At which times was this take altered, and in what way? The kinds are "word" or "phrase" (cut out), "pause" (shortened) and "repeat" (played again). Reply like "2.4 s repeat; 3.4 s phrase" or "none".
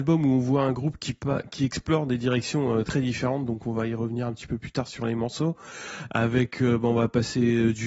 2.8 s word